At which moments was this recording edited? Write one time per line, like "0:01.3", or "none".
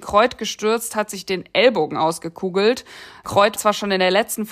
0:03.6

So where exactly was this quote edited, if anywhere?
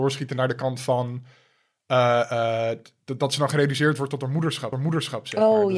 0:04.7

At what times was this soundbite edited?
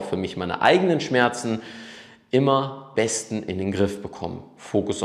0:02.9

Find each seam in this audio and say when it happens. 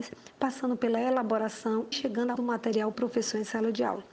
0:01.9
0:02.3
0:02.9

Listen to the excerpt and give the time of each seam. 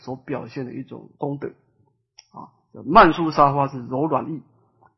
0:01.1

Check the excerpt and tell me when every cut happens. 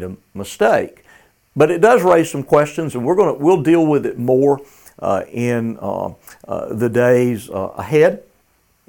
none

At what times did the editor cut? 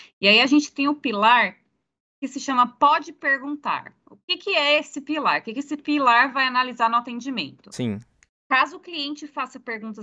none

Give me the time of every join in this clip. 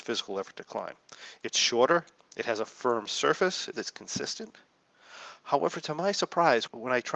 0:03.7

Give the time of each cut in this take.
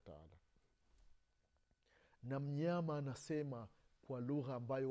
none

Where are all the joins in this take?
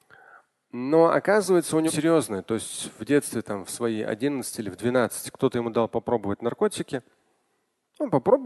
0:01.9

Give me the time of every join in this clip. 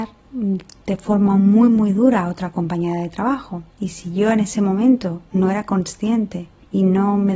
0:03.7

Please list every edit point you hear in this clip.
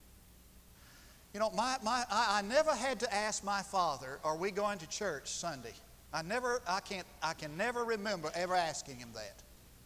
none

